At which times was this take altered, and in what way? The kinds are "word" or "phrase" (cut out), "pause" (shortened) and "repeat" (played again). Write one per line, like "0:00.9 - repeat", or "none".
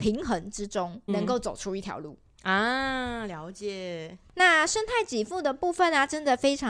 0:01.1 - word